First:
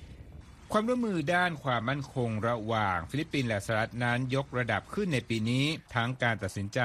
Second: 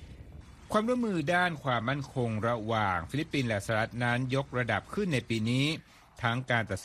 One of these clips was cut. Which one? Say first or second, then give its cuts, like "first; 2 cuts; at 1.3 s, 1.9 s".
first; 1 cut; at 5.9 s